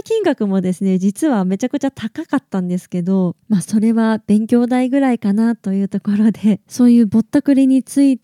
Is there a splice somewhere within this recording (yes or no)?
yes